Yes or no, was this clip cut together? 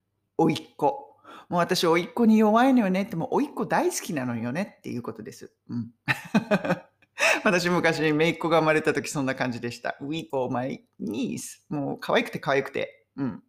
yes